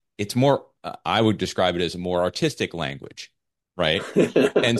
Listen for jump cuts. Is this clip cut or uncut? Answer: uncut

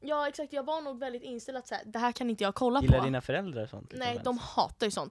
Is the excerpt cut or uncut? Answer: uncut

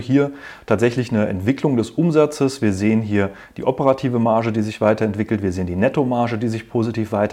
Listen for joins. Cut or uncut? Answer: uncut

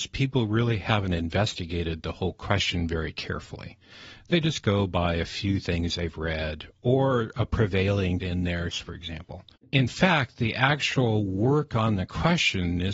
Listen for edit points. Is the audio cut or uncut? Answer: cut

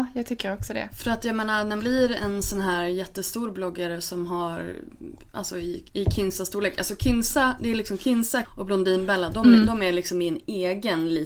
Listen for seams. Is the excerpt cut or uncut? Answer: cut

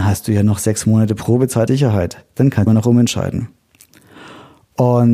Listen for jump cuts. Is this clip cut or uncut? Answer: cut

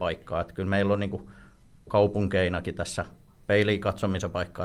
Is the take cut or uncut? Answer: uncut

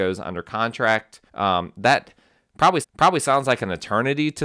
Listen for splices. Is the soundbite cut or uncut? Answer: cut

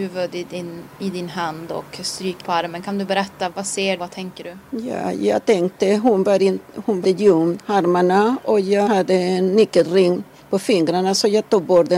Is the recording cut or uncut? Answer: cut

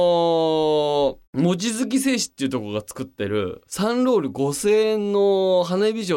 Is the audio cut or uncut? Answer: cut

